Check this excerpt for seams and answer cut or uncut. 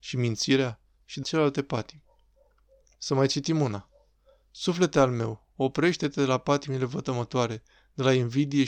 cut